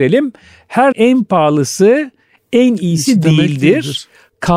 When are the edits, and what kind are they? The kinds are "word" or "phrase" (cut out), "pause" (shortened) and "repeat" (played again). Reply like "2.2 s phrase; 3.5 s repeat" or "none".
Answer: 0.9 s word